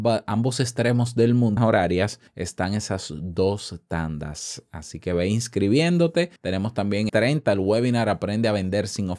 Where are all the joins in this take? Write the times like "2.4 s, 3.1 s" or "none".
1.6 s, 2.3 s, 6.4 s, 7.1 s